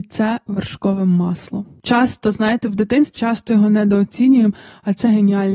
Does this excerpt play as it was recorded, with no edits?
no; 1 cut; at 3.2 s

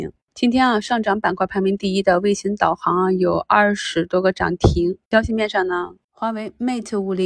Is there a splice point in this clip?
yes; 2 cuts; at 5.0 s, 6.1 s

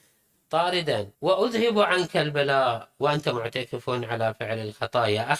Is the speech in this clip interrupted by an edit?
yes; 1 cut; at 1.1 s

